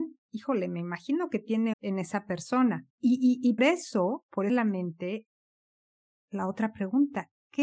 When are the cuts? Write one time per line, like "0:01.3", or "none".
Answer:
0:01.7
0:02.9
0:03.6
0:04.5